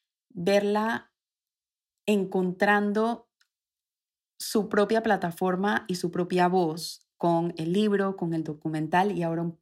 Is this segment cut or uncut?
uncut